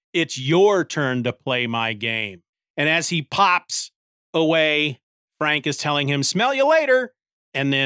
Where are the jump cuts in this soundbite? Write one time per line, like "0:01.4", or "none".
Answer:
none